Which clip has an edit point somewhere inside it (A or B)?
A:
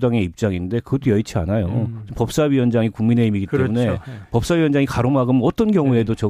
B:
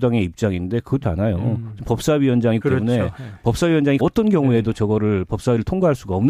B